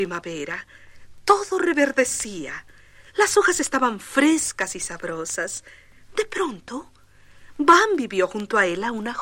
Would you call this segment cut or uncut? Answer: cut